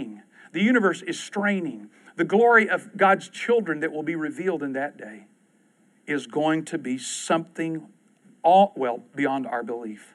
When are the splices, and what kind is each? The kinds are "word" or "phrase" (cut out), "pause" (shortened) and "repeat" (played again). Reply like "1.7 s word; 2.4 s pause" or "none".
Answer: none